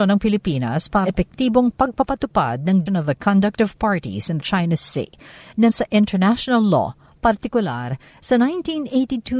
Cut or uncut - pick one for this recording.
cut